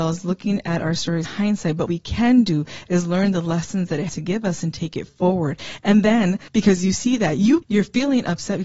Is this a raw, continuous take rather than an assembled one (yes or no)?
no